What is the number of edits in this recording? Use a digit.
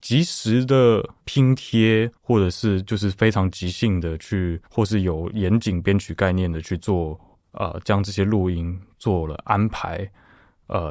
4